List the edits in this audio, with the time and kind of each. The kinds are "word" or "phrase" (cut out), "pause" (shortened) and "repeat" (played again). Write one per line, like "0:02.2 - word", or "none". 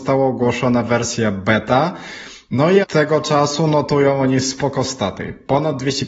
0:02.8 - word